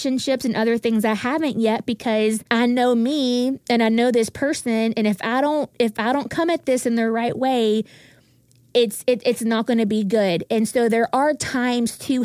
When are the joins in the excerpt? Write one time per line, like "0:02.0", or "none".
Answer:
0:02.5